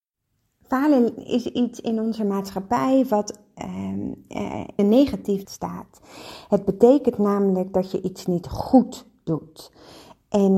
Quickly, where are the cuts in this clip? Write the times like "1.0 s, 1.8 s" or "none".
4.8 s, 5.4 s